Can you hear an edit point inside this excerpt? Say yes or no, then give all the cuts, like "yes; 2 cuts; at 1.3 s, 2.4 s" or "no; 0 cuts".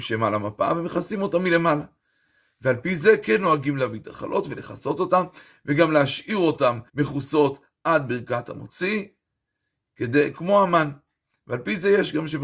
yes; 1 cut; at 6.9 s